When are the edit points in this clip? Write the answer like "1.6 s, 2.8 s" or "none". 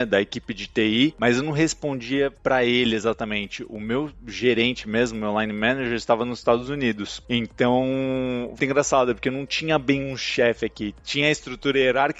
8.6 s